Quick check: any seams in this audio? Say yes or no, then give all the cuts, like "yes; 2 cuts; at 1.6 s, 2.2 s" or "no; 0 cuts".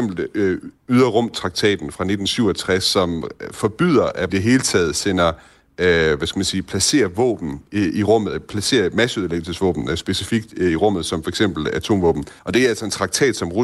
yes; 2 cuts; at 4.3 s, 12.4 s